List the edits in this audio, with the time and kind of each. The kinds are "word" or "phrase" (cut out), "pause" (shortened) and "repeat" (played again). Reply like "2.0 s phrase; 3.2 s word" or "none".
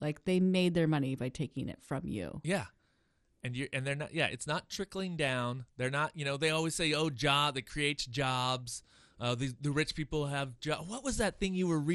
none